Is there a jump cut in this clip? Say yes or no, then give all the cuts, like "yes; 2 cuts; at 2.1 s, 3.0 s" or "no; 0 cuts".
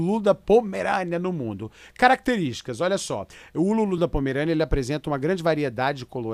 no; 0 cuts